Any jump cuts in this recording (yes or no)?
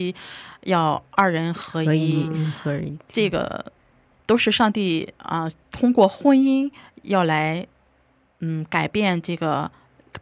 no